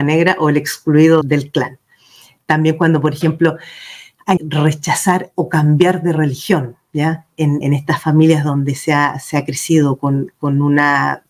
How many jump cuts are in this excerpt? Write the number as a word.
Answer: three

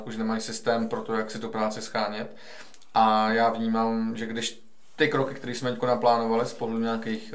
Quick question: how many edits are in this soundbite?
zero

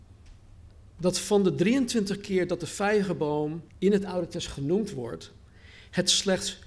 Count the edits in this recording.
one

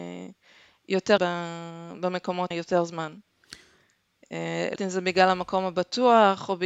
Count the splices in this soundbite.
three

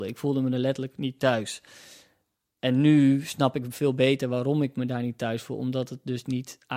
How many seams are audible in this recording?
zero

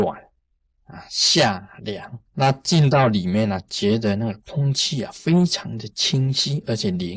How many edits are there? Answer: one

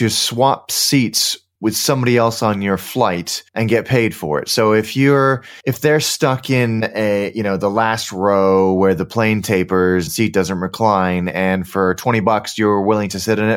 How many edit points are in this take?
three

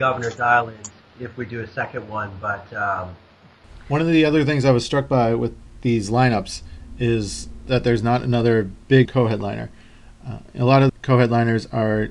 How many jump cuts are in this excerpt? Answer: three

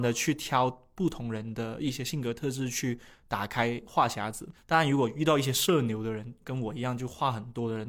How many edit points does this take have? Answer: zero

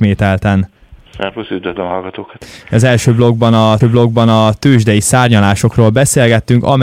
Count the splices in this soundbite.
one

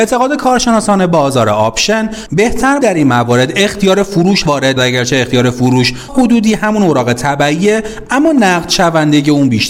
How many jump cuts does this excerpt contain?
four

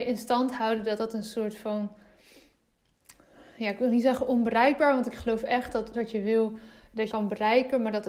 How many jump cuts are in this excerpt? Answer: two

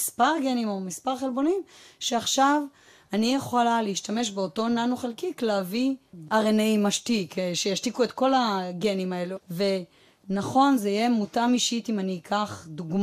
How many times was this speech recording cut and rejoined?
zero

